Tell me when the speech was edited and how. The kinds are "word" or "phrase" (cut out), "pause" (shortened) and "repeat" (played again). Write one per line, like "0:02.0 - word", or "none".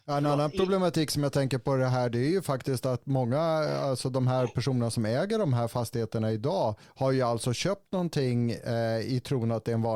0:06.8 - pause